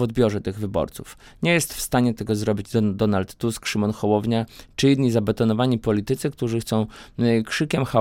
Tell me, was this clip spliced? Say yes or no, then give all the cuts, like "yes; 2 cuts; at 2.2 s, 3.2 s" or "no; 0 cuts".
no; 0 cuts